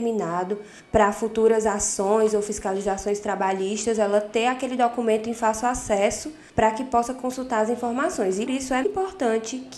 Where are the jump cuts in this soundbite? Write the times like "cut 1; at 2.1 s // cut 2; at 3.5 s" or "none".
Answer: cut 1; at 8.5 s // cut 2; at 8.8 s